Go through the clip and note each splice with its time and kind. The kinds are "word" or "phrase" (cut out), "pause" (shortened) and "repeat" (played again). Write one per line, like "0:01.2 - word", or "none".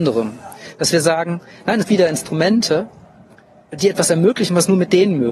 0:01.8 - phrase